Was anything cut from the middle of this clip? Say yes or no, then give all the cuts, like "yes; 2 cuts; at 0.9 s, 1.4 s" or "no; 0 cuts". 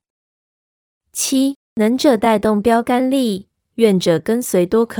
yes; 1 cut; at 1.6 s